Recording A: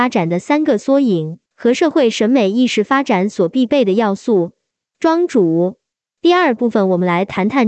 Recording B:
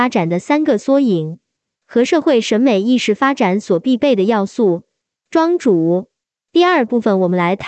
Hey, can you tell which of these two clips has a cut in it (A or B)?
A